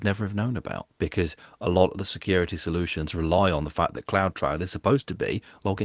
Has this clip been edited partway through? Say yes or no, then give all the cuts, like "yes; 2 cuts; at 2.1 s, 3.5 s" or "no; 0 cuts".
yes; 1 cut; at 0.9 s